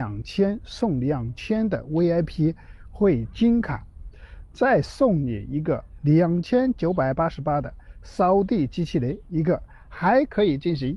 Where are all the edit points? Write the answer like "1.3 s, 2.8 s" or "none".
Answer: none